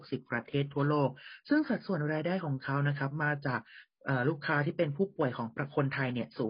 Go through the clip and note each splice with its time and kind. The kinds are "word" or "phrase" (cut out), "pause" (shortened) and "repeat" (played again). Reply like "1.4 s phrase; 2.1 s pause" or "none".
none